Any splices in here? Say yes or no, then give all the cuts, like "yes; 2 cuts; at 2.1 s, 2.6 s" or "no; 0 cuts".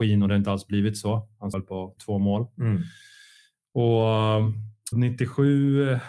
yes; 3 cuts; at 1.5 s, 2.0 s, 4.9 s